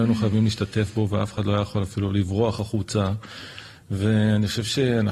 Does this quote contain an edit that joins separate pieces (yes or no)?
no